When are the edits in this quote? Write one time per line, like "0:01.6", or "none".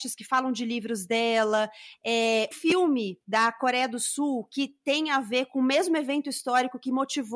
0:02.5